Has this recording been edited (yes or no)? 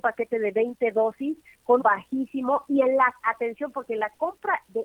yes